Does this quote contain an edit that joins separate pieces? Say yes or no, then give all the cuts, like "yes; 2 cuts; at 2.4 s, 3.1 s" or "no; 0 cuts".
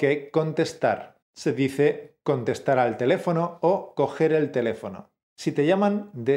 yes; 2 cuts; at 1.2 s, 5.2 s